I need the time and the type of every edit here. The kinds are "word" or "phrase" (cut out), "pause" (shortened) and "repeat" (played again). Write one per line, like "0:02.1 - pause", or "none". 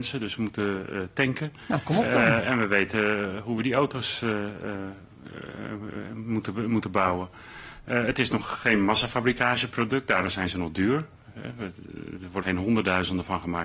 0:12.4 - word